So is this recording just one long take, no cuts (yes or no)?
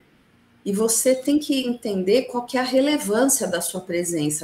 yes